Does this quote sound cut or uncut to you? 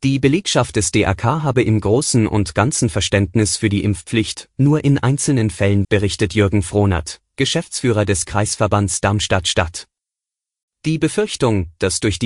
cut